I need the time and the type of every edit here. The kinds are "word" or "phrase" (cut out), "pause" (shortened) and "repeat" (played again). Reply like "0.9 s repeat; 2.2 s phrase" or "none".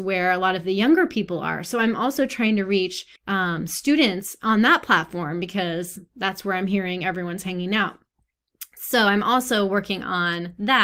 3.2 s pause